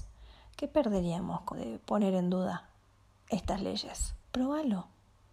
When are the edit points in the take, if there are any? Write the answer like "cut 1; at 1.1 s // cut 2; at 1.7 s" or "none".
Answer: cut 1; at 1.5 s // cut 2; at 4.2 s